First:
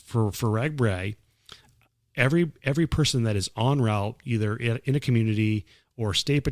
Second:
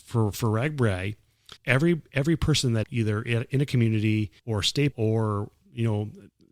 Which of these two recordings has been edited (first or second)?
second